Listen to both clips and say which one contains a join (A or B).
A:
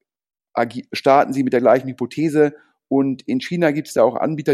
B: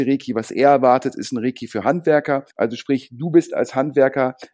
B